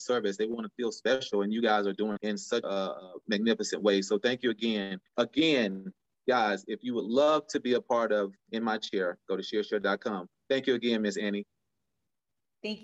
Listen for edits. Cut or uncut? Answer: cut